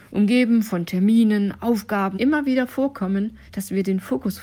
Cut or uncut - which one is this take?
cut